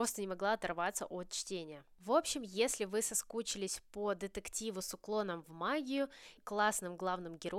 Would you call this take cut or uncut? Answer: cut